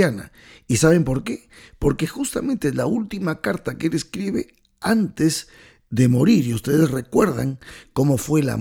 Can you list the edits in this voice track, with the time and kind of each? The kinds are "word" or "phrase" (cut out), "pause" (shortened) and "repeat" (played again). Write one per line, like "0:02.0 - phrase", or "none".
none